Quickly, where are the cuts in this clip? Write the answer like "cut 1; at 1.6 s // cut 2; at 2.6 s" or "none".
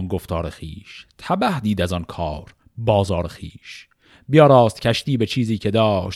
none

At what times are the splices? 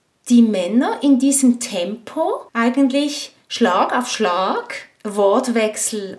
cut 1; at 2.5 s

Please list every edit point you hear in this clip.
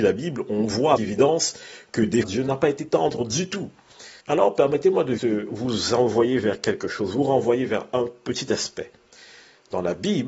cut 1; at 1.0 s // cut 2; at 2.2 s // cut 3; at 4.2 s // cut 4; at 5.2 s

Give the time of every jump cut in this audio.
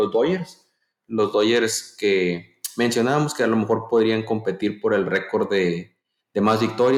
none

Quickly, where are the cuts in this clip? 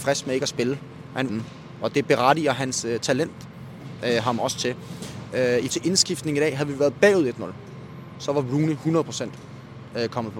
cut 1; at 1.3 s // cut 2; at 5.7 s

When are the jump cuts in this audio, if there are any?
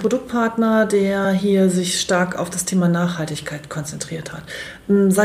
none

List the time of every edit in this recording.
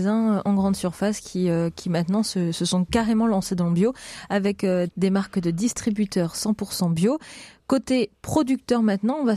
none

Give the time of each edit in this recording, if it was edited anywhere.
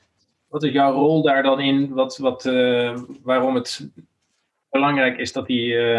none

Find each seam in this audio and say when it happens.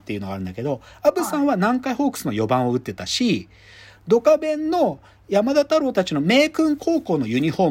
none

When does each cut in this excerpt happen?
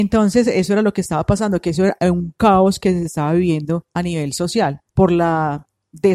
cut 1; at 4.9 s

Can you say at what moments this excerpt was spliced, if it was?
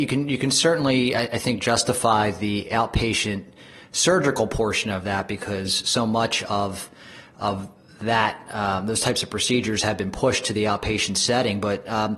none

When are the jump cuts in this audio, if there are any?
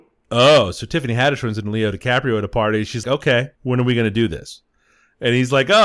cut 1; at 3.0 s // cut 2; at 3.5 s

